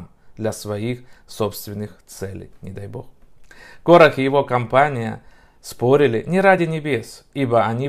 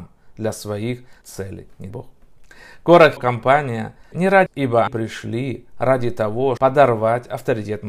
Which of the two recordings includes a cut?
second; 7 cuts; at 1.2 s, 1.9 s, 3.2 s, 4.1 s, 4.5 s, 4.9 s, 6.6 s

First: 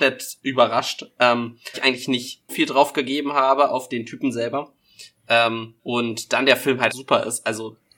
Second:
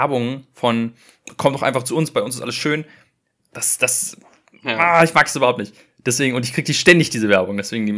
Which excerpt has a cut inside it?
first; 5 cuts; at 1.7 s, 2.5 s, 3.9 s, 5.8 s, 6.9 s

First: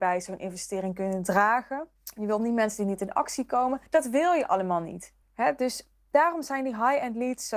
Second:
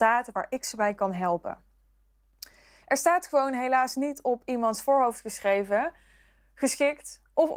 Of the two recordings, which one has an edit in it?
first; 3 cuts; at 2.0 s, 3.9 s, 5.2 s

